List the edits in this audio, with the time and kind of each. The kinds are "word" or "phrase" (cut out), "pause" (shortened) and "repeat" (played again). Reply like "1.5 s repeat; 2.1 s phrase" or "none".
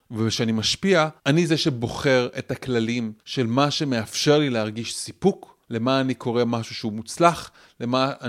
1.2 s pause; 3.2 s pause; 5.6 s pause